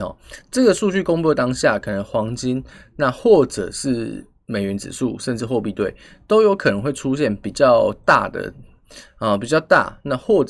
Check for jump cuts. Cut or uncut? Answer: uncut